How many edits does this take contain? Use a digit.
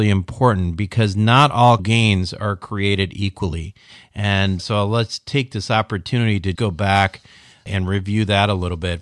3